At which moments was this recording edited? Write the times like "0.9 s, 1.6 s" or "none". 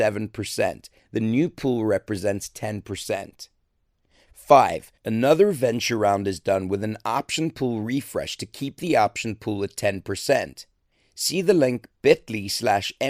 5.0 s